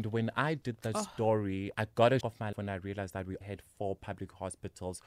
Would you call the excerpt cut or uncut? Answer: cut